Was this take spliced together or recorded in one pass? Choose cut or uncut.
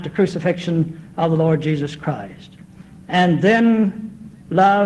uncut